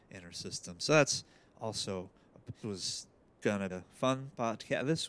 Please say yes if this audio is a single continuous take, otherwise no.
no